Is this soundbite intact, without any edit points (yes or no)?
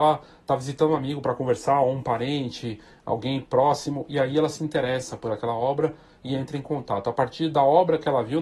yes